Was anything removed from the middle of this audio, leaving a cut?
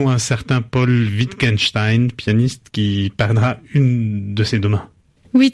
no; 0 cuts

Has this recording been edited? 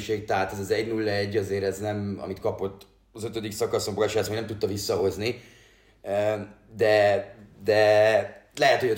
no; 0 cuts

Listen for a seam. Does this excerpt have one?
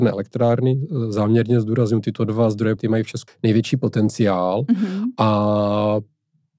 yes; 2 cuts; at 2.8 s, 3.3 s

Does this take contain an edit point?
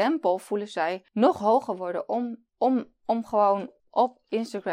yes; 3 cuts; at 1.1 s, 2.5 s, 3.8 s

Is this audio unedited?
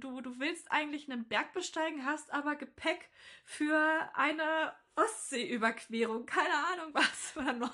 yes; 0 cuts

